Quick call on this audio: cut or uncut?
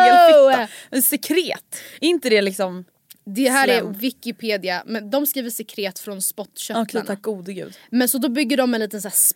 uncut